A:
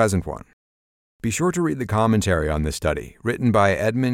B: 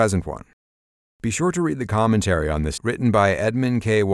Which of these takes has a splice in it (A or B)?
B